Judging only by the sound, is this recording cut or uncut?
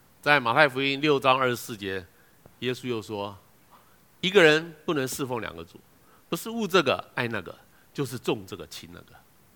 uncut